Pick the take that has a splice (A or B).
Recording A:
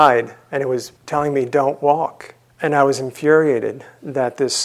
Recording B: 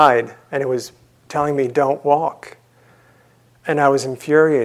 A